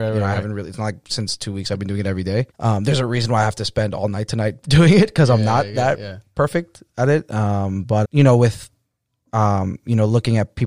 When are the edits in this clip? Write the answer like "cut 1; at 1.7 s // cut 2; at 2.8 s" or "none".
cut 1; at 2.5 s // cut 2; at 8.0 s